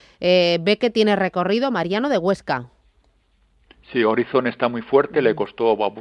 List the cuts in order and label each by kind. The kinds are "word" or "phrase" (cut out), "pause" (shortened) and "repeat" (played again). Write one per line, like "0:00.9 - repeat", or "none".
none